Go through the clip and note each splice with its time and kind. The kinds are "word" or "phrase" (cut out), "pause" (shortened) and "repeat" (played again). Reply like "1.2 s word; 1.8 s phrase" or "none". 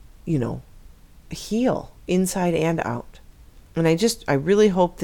2.0 s pause; 3.7 s pause